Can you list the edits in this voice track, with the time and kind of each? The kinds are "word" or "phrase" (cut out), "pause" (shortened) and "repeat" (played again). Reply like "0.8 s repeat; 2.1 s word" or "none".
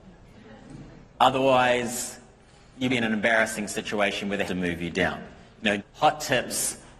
2.9 s word; 4.4 s word; 5.8 s word